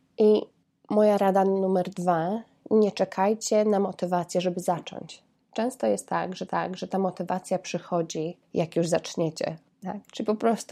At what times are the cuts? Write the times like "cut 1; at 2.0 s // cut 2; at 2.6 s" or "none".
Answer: cut 1; at 5.3 s // cut 2; at 6.5 s // cut 3; at 8.4 s // cut 4; at 9.7 s